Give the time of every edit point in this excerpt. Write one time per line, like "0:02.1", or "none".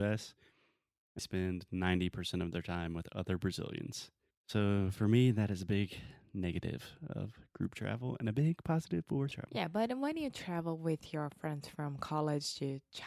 0:01.2
0:09.3